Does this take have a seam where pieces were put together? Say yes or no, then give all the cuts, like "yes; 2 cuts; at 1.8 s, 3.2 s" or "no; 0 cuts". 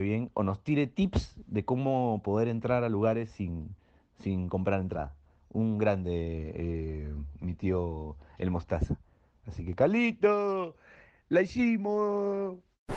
no; 0 cuts